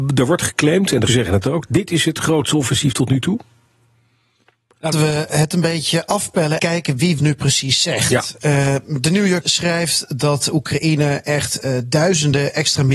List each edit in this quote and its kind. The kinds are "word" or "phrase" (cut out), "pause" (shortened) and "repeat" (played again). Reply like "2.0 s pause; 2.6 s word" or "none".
1.1 s word; 4.9 s word; 6.6 s word; 7.2 s word; 9.4 s word